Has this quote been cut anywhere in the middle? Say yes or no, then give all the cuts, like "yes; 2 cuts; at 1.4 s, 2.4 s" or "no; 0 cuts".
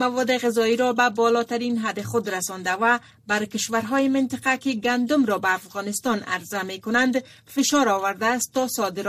no; 0 cuts